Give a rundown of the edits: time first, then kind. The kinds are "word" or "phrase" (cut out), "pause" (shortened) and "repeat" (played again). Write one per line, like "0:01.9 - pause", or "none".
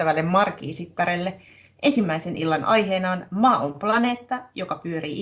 none